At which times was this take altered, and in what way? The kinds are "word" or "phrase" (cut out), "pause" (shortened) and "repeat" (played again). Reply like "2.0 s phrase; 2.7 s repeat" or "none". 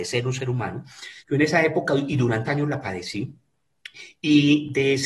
1.2 s pause; 2.5 s word